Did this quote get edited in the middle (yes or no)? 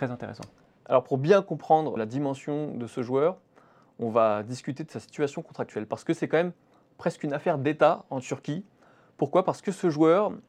yes